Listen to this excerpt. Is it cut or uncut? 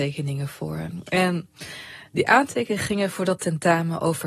uncut